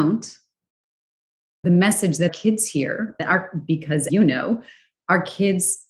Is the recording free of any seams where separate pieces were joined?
no; 4 cuts; at 1.6 s, 2.3 s, 3.2 s, 4.1 s

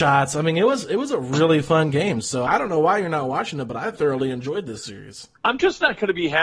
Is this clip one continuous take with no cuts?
no; 3 cuts; at 2.5 s, 4.0 s, 5.4 s

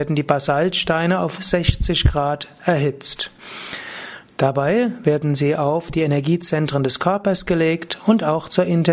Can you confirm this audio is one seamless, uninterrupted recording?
no; 1 cut; at 1.4 s

